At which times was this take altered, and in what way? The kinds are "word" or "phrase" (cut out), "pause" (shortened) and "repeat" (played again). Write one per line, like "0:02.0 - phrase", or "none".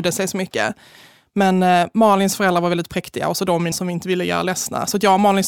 0:03.7 - word